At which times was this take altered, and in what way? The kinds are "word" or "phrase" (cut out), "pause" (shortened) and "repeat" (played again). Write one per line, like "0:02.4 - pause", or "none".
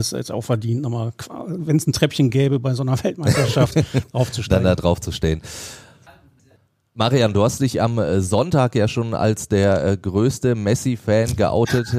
none